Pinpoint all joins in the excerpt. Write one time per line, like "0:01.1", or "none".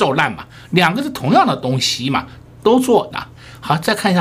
0:03.1

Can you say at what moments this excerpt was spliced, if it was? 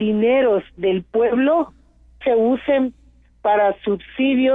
0:02.2

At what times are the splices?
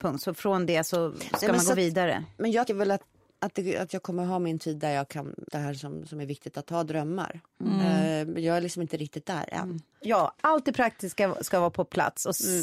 0:02.7
0:05.5

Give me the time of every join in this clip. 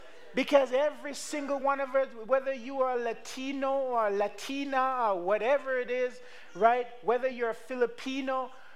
none

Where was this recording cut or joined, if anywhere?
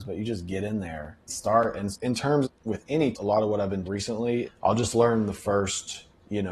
0:01.3
0:01.9
0:02.4
0:03.1
0:03.8
0:04.4

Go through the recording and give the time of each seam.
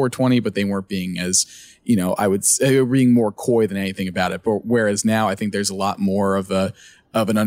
none

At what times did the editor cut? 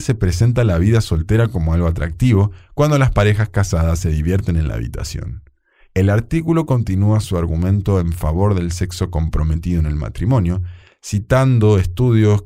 none

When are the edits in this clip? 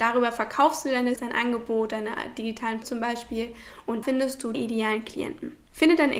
0:01.2
0:02.8
0:04.0
0:04.5

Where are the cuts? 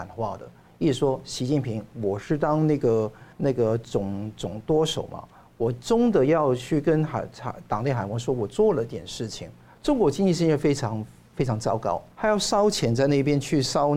0:03.3
0:09.7
0:12.1

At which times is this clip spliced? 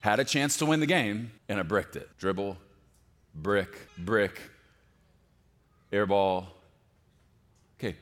0:01.4
0:02.1
0:03.9

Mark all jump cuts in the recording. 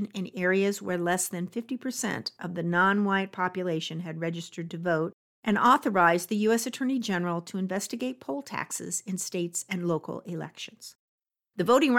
none

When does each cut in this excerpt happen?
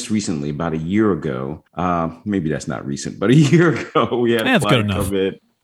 0:01.7

